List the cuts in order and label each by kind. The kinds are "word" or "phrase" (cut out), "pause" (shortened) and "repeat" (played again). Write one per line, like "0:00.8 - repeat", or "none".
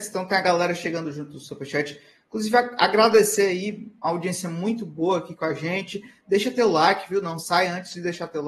none